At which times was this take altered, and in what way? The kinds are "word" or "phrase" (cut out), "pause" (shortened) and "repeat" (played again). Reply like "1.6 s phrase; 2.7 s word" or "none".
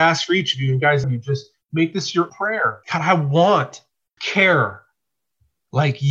1.0 s phrase; 2.3 s word; 2.8 s pause; 4.2 s word